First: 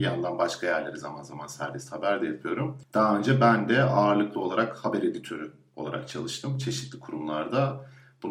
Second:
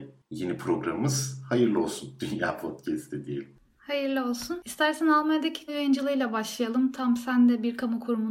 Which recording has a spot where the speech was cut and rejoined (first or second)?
second